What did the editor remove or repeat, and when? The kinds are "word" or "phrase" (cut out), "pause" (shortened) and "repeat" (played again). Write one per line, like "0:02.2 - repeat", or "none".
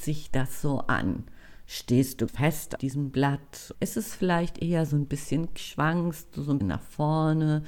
0:02.3 - word
0:02.8 - word
0:03.7 - word
0:05.6 - word
0:06.6 - word